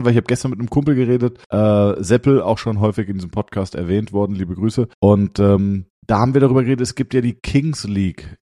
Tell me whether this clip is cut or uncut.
cut